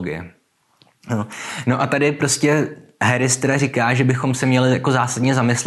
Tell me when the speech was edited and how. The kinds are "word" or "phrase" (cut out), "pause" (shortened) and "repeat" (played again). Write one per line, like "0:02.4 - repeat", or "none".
none